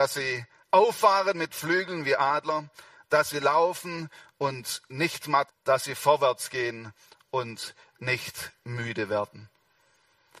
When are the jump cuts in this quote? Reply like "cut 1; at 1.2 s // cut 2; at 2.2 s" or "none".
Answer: cut 1; at 5.5 s